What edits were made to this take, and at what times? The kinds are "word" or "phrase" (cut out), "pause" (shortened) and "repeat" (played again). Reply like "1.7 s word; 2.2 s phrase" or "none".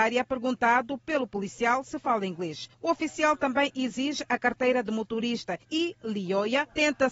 2.7 s pause; 5.6 s pause